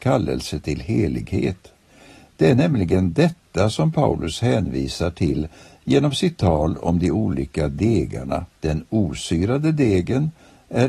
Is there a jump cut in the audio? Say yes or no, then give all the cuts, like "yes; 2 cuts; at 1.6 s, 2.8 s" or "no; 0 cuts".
yes; 1 cut; at 8.6 s